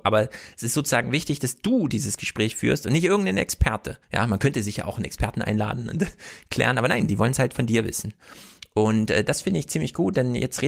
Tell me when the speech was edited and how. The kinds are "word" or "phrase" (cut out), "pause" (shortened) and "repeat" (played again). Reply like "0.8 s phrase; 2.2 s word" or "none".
4.0 s pause